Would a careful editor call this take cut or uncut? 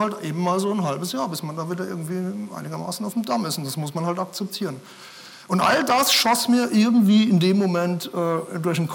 uncut